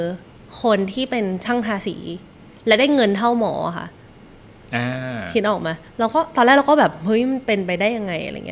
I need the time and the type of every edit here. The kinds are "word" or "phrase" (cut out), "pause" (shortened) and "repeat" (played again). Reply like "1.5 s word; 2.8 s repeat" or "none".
none